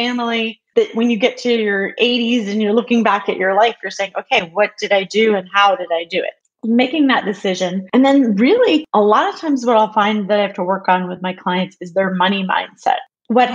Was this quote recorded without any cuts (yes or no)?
yes